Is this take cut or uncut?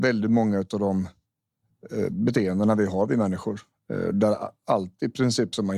uncut